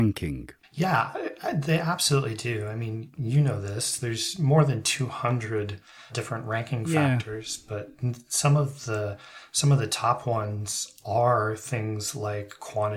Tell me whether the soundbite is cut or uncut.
cut